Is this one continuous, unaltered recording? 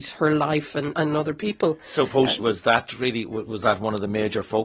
no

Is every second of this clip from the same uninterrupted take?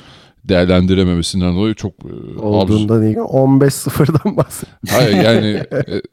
no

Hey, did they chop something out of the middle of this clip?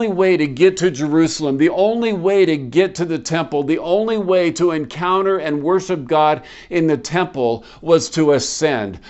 no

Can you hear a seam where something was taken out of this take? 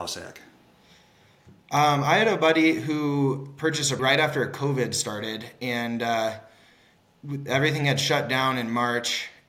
yes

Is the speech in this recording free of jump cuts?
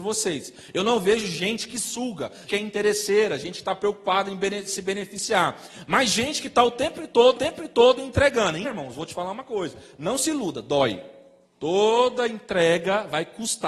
no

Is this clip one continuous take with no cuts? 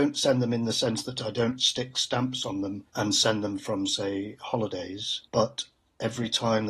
no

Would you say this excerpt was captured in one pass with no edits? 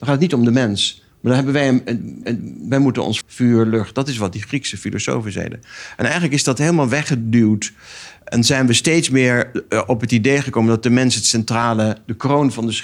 no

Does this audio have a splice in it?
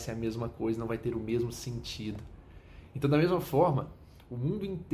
no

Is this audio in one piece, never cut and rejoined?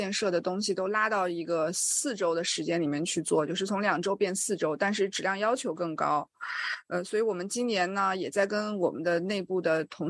yes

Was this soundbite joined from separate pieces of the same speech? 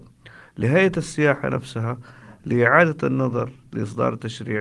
no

